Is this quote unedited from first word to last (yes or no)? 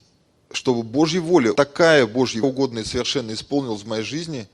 no